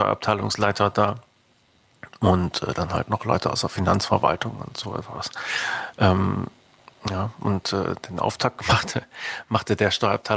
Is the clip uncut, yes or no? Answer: yes